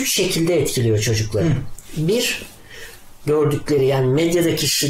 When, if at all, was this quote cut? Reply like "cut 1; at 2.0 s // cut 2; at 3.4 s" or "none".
cut 1; at 3.2 s